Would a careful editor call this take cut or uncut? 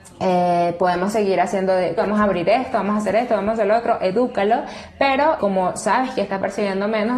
cut